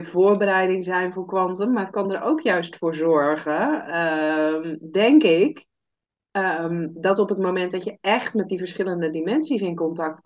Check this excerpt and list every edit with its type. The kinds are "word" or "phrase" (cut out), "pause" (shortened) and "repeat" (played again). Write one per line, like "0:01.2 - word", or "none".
none

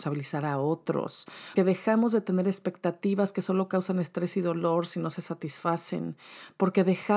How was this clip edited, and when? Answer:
0:01.6 - word

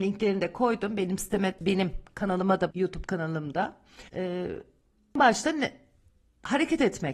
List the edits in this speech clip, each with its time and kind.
0:01.6 - word
0:02.7 - word
0:04.1 - pause

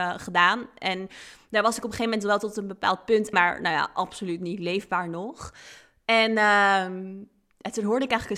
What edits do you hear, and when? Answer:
0:03.3 - word

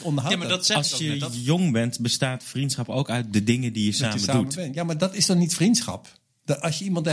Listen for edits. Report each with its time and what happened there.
none

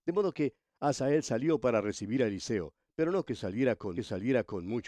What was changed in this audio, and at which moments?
0:03.3 - word
0:04.0 - repeat

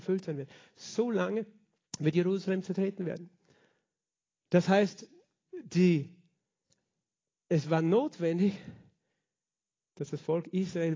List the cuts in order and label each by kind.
none

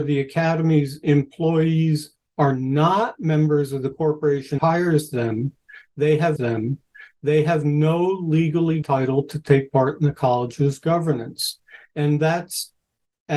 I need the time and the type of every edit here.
0:04.6 - word
0:06.4 - repeat
0:08.8 - word

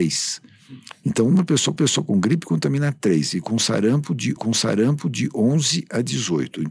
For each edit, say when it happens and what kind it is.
0:01.8 - repeat
0:04.4 - repeat

